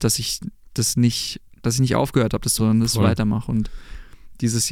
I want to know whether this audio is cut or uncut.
cut